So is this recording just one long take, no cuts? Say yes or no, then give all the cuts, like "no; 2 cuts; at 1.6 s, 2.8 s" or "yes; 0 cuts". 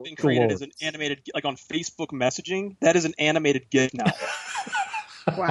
yes; 0 cuts